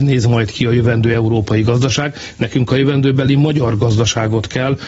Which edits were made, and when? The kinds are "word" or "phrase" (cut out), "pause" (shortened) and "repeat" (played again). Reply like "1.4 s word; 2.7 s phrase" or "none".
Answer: none